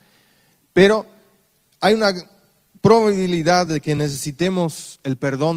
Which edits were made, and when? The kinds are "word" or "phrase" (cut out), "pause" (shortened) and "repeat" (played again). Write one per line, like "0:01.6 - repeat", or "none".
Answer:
none